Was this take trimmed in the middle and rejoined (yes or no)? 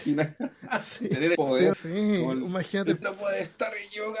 yes